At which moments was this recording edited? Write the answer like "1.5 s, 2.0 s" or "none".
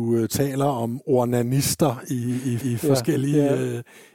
2.6 s

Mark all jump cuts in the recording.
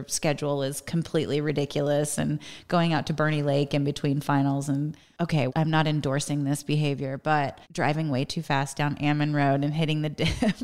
5.5 s, 7.6 s

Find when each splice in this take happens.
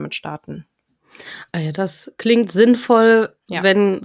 none

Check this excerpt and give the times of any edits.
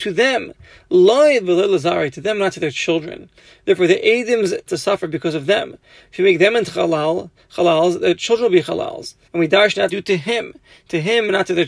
4.7 s, 9.2 s, 9.9 s

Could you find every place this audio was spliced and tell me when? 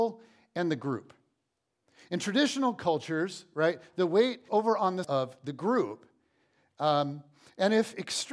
4.5 s, 5.0 s

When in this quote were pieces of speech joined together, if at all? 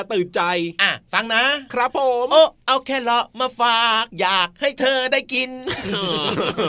4.1 s

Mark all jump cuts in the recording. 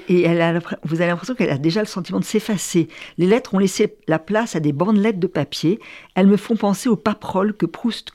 none

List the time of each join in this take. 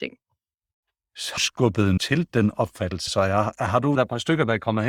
1.4 s, 2.0 s, 3.1 s, 4.0 s

